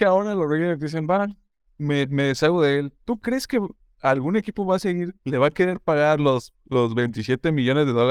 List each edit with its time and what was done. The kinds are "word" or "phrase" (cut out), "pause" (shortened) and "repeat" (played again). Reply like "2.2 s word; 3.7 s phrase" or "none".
1.6 s pause; 3.9 s pause; 5.2 s pause